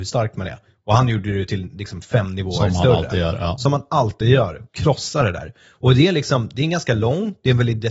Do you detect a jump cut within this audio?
no; 0 cuts

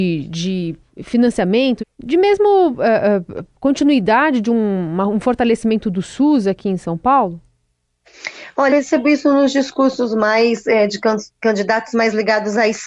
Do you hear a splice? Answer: yes; 2 cuts; at 1.8 s, 8.7 s

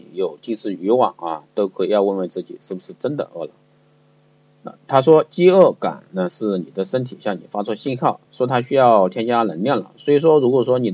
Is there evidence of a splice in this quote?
yes; 1 cut; at 8.3 s

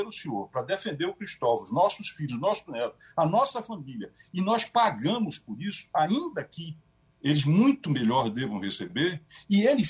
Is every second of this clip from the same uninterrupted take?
yes; 0 cuts

